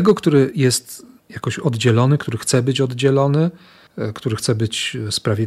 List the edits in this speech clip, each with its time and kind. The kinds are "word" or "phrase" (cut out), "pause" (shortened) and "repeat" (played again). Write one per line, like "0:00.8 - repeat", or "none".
none